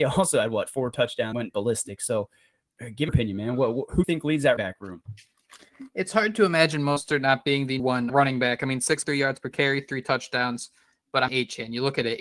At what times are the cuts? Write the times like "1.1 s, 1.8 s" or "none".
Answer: 1.3 s, 3.1 s, 4.0 s, 4.6 s, 7.8 s, 8.1 s, 9.0 s, 11.3 s